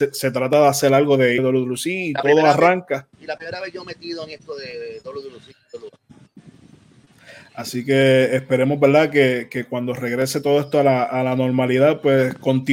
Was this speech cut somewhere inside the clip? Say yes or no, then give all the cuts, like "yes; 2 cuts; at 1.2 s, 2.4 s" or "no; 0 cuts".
yes; 2 cuts; at 1.4 s, 3.1 s